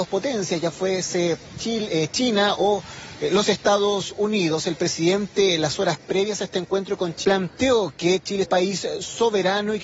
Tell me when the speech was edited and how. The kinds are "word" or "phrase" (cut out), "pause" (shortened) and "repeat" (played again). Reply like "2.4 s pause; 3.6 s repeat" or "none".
7.2 s word; 8.4 s phrase